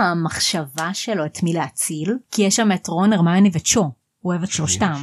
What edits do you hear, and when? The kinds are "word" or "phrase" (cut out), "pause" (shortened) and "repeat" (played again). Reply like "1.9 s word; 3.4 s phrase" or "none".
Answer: 2.2 s pause